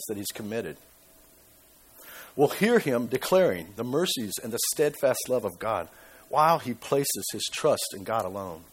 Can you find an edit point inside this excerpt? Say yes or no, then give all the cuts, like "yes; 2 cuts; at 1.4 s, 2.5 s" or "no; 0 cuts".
no; 0 cuts